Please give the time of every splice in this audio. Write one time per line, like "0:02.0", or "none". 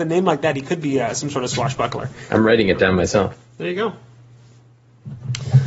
none